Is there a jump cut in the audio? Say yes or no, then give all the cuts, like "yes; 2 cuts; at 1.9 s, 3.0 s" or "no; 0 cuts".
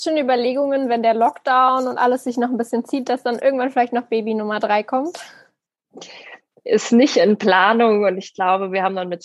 no; 0 cuts